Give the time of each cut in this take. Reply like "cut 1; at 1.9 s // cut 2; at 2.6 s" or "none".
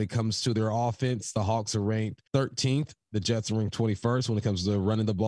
cut 1; at 2.3 s